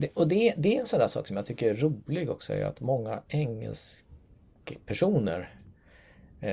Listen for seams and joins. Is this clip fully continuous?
no; 1 cut; at 3.3 s

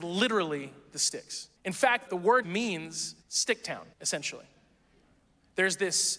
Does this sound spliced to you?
yes; 5 cuts; at 1.6 s, 2.1 s, 2.4 s, 3.2 s, 3.9 s

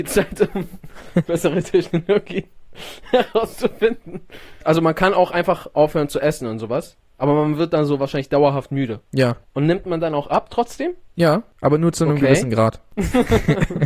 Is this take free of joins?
no; 1 cut; at 9.0 s

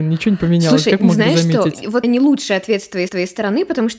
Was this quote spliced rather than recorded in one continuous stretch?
yes; 2 cuts; at 2.0 s, 3.1 s

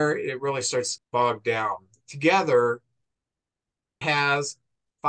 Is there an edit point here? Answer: yes; 2 cuts; at 1.0 s, 4.0 s

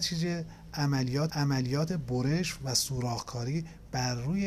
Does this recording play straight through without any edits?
no; 1 cut; at 1.3 s

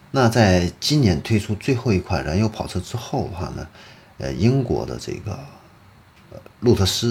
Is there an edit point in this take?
no; 0 cuts

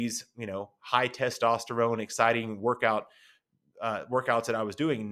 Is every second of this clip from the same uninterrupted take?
yes; 0 cuts

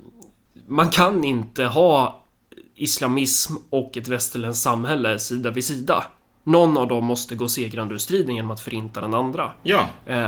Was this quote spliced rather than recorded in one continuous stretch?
no; 0 cuts

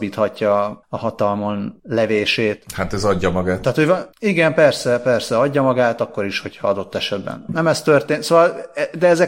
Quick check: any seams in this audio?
no; 0 cuts

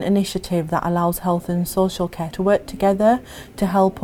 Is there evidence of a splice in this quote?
yes; 1 cut; at 2.3 s

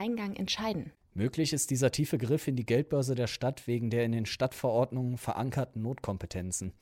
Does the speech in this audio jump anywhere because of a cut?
no; 0 cuts

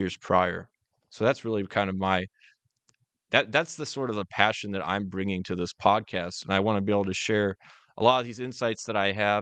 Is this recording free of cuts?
yes; 0 cuts

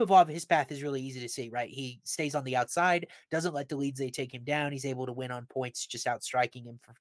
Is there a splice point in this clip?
no; 0 cuts

